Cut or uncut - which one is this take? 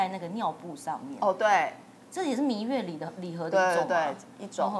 uncut